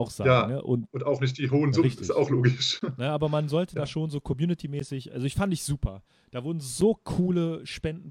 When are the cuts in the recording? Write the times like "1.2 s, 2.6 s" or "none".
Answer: none